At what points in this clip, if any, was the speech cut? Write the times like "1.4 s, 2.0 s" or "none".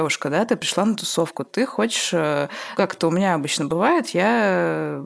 2.8 s